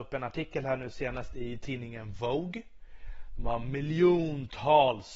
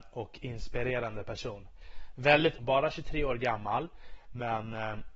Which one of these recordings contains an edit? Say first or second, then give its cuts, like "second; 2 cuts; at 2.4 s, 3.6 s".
second; 1 cut; at 2.6 s